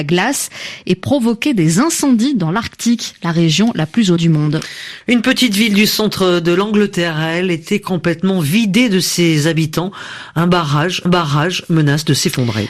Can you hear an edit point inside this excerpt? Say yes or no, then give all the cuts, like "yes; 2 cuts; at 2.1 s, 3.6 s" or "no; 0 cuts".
yes; 2 cuts; at 4.2 s, 11.1 s